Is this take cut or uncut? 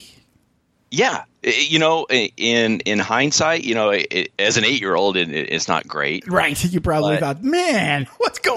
uncut